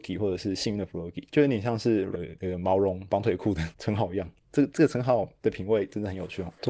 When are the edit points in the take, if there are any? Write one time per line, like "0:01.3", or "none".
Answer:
0:02.1